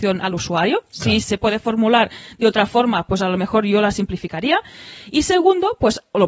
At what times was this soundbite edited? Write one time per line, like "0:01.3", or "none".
none